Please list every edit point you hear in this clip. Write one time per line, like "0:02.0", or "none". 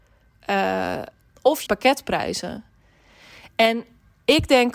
0:01.3
0:01.7